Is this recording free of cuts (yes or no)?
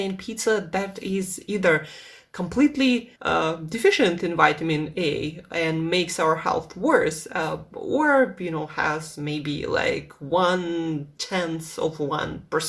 no